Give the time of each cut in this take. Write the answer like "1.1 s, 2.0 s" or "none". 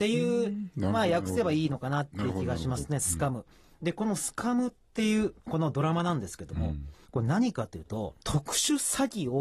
3.5 s, 5.4 s, 8.2 s